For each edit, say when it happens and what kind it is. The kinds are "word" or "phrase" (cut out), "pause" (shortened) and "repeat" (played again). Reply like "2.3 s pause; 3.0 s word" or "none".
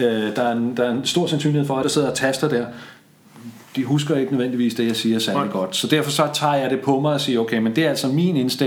1.8 s phrase